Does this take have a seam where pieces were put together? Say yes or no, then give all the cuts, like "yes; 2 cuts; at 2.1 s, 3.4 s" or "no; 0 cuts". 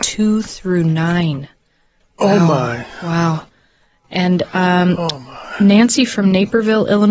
no; 0 cuts